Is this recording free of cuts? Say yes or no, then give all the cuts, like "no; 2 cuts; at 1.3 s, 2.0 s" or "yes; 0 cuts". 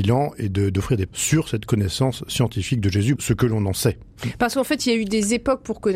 no; 2 cuts; at 1.1 s, 3.2 s